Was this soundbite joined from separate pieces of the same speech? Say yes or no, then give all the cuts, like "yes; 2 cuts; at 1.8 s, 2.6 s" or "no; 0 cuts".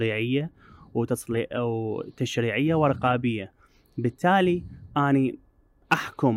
no; 0 cuts